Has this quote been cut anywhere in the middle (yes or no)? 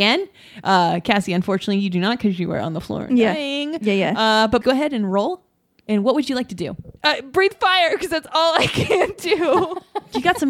yes